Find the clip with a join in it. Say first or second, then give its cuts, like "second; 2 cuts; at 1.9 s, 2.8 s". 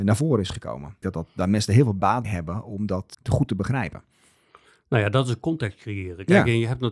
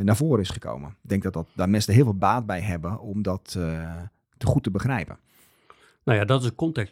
first; 3 cuts; at 1.0 s, 2.2 s, 3.1 s